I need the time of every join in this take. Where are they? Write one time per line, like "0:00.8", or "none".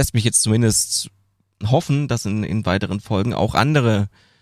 none